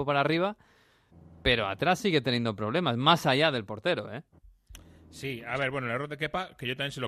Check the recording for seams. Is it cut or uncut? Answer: uncut